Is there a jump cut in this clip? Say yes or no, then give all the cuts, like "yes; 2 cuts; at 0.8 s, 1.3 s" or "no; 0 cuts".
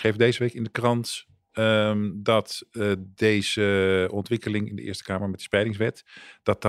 no; 0 cuts